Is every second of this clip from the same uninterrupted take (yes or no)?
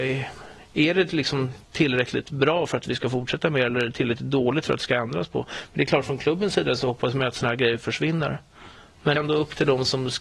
no